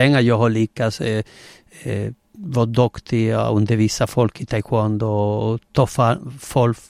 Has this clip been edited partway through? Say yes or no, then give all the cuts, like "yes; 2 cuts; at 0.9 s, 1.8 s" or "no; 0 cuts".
no; 0 cuts